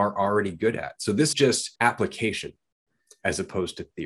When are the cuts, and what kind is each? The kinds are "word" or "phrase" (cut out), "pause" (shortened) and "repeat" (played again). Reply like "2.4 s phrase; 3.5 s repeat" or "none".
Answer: 1.3 s word; 1.8 s pause